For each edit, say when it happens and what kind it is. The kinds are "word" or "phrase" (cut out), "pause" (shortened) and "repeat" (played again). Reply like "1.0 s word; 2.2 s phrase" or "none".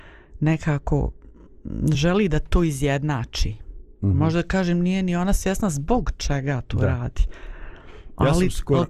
none